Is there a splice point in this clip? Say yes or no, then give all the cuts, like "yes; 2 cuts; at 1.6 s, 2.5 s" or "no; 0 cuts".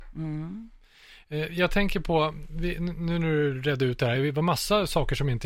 no; 0 cuts